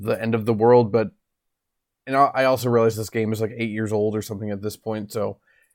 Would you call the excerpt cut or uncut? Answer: uncut